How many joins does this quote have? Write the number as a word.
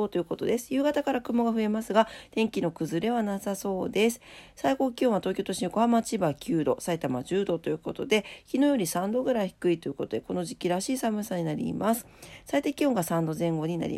zero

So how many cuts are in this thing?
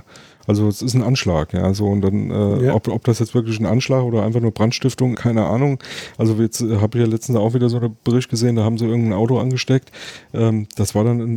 one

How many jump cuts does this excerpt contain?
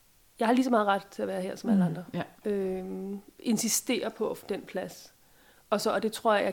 two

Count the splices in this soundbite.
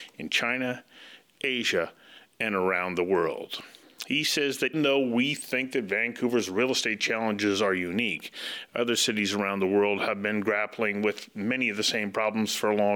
one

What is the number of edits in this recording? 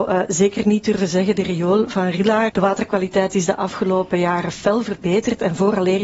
one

